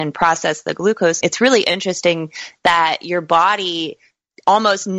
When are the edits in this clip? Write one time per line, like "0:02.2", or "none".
0:01.2